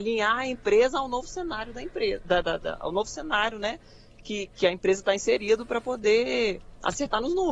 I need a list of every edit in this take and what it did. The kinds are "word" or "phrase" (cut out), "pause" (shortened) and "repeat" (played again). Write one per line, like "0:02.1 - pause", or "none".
0:02.4 - word
0:04.5 - word